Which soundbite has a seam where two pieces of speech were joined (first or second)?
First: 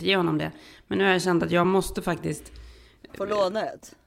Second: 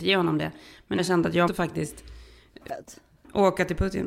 second